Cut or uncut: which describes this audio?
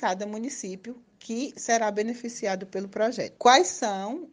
uncut